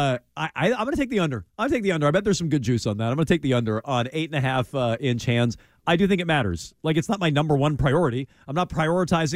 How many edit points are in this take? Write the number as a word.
one